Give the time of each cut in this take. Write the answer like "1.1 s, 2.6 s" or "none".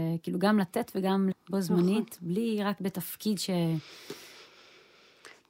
1.3 s, 2.8 s